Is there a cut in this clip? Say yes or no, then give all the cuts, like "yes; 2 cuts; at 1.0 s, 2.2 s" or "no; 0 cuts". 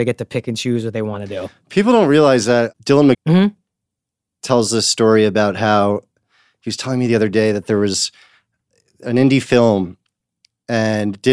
yes; 1 cut; at 3.1 s